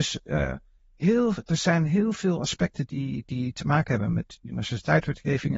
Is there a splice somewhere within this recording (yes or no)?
no